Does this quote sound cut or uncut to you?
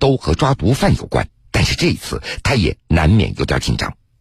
cut